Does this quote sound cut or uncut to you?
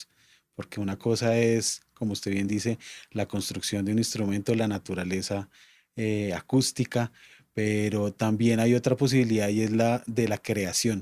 uncut